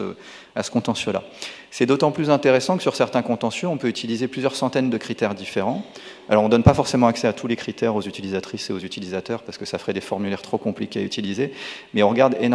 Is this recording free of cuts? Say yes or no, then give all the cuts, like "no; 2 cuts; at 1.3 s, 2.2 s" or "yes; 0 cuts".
yes; 0 cuts